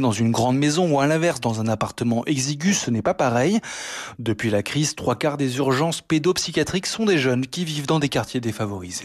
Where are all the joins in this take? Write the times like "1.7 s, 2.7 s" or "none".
none